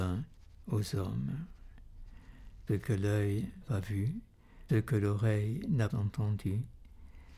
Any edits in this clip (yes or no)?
yes